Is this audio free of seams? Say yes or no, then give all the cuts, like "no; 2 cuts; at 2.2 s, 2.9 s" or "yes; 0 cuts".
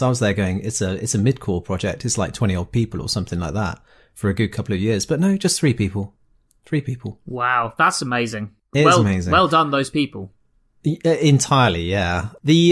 yes; 0 cuts